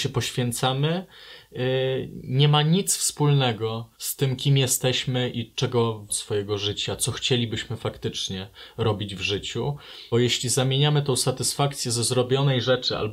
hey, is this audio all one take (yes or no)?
no